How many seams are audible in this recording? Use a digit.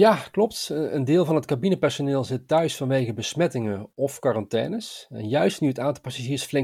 0